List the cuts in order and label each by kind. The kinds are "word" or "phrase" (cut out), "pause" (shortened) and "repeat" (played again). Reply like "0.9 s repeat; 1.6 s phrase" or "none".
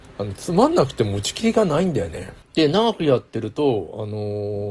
2.4 s pause